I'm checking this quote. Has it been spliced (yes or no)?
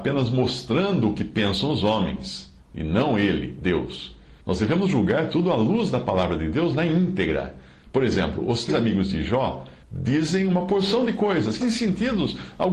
yes